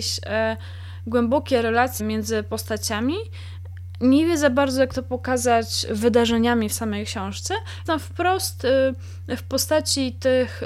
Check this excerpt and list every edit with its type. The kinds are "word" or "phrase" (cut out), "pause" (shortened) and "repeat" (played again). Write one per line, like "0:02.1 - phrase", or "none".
0:02.0 - word
0:07.9 - word